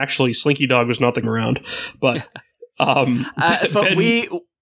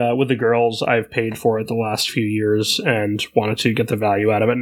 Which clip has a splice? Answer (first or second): first